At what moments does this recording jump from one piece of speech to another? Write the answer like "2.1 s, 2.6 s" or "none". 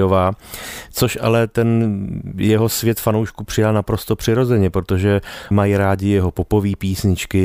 5.5 s